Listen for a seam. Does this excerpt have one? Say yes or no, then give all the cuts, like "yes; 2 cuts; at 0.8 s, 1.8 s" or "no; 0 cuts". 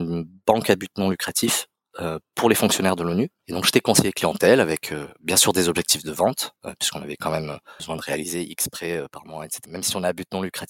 no; 0 cuts